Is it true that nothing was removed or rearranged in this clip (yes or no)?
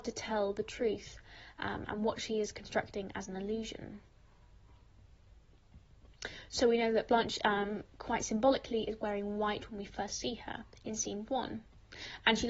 yes